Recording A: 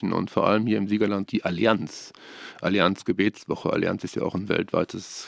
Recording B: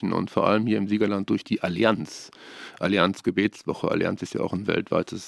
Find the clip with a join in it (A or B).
A